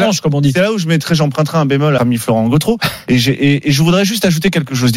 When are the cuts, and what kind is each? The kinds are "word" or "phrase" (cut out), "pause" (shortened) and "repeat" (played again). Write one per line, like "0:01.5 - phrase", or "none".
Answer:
0:02.0 - phrase